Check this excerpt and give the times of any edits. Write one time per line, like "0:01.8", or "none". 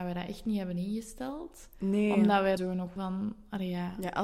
0:02.6
0:03.0

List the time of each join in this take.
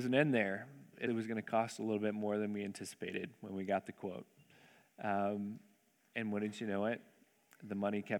0:01.1

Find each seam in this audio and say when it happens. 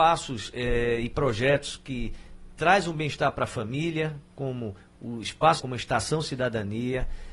0:05.6

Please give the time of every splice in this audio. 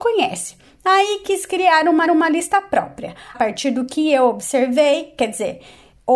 0:02.0
0:03.3

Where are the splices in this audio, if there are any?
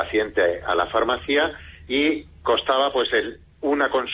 none

